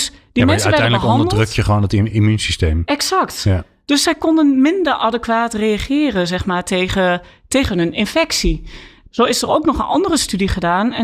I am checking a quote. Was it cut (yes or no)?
no